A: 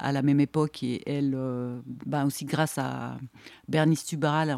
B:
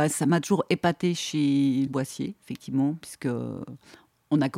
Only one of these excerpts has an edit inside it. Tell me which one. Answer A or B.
B